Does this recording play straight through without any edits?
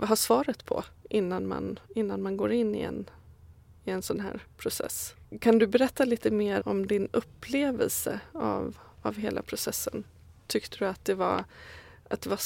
no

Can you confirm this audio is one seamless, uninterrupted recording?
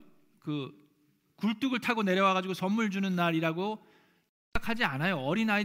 yes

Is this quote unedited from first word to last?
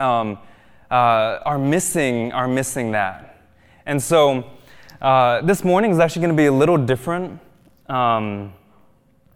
yes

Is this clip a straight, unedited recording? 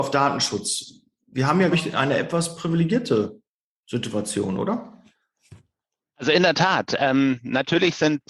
no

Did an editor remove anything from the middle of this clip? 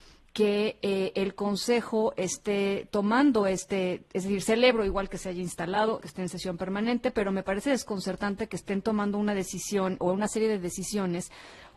yes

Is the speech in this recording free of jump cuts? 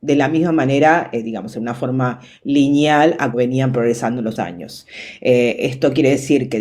no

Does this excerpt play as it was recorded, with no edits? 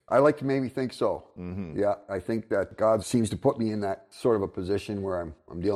no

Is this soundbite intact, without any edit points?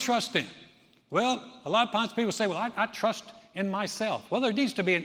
yes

